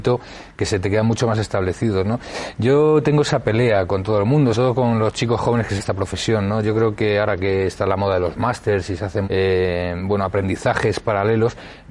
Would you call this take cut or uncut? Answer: cut